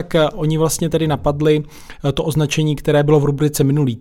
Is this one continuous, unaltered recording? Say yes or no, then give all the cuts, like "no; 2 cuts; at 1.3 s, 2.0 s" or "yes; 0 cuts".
yes; 0 cuts